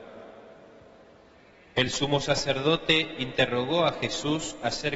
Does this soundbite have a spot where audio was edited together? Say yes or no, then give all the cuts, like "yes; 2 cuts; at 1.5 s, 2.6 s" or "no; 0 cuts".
no; 0 cuts